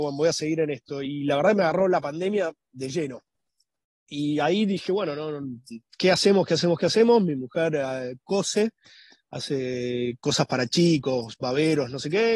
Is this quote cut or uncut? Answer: uncut